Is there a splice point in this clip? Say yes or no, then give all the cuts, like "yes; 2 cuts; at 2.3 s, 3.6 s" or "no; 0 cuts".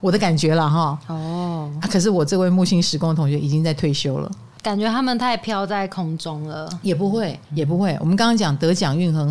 yes; 1 cut; at 7.4 s